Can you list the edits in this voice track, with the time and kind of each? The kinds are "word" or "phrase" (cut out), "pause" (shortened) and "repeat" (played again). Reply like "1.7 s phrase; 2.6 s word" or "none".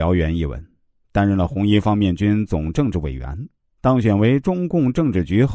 none